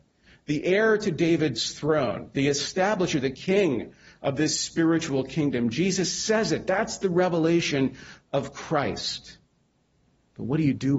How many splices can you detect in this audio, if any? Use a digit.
0